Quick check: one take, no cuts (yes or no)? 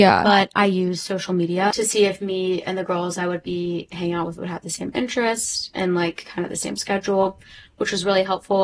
yes